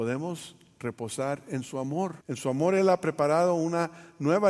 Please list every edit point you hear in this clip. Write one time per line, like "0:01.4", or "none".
0:02.2

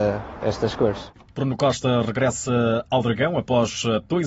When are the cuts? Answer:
none

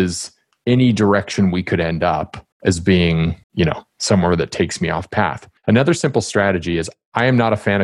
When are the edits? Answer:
0:02.5
0:03.4
0:05.6

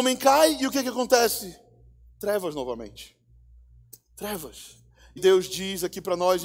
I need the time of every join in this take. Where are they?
0:05.2

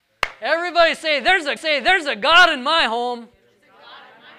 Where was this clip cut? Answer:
0:01.6

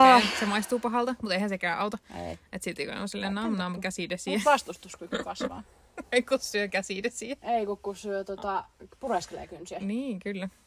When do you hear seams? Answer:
none

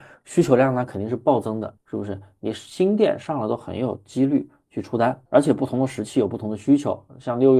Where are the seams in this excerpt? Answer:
0:01.8
0:05.3

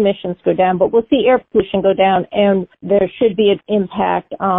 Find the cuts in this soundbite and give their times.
0:03.6

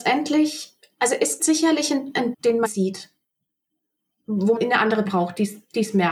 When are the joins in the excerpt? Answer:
0:01.4
0:02.3
0:02.6
0:04.6
0:05.0

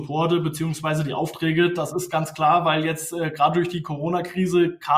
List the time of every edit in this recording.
none

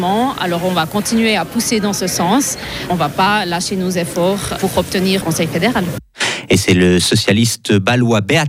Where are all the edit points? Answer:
0:04.6
0:05.2

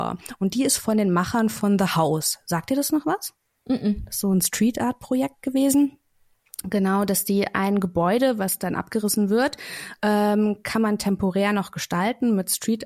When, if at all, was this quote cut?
none

